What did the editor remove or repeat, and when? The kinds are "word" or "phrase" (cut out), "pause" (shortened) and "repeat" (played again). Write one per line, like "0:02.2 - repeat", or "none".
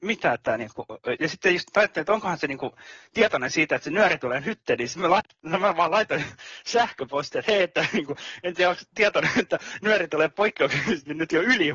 0:01.2 - word

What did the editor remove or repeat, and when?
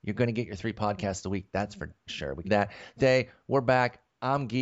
0:02.1 - word
0:02.4 - phrase
0:03.0 - word

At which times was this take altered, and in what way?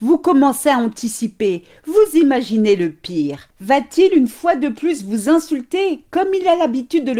none

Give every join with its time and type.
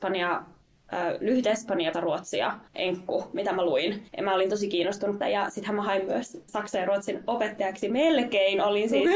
0:01.9 - phrase
0:02.7 - pause
0:04.1 - pause
0:05.2 - word
0:06.5 - word

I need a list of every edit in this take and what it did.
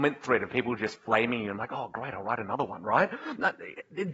none

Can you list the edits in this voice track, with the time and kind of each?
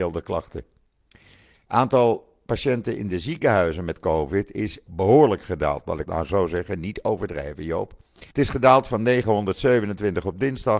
0:04.9 - phrase
0:06.1 - word
0:08.3 - pause

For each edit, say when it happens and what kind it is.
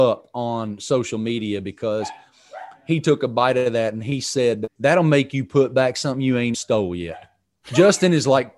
0:04.7 - word
0:06.5 - word

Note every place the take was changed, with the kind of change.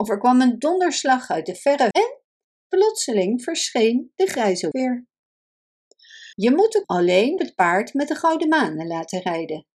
0:01.9 - word
0:04.7 - word
0:06.3 - pause
0:06.8 - word
0:07.4 - word

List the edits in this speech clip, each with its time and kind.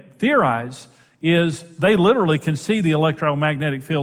none

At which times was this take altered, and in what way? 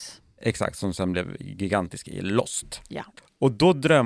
none

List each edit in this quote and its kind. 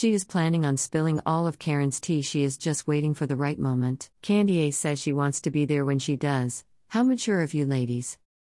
0:04.1 - pause

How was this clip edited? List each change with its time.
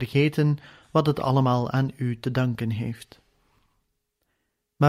none

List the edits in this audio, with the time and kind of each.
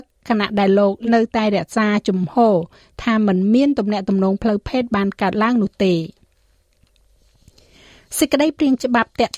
0:01.1 - word

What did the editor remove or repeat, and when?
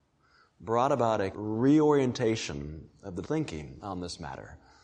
0:01.3 - word
0:03.2 - word

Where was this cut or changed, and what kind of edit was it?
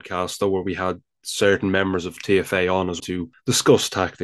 0:03.0 - word

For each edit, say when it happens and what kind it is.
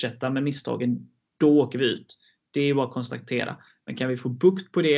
none

